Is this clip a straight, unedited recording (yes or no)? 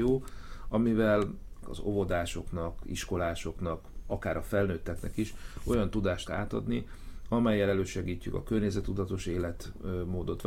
no